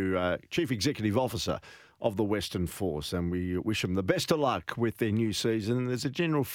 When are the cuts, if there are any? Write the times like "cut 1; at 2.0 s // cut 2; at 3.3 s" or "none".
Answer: none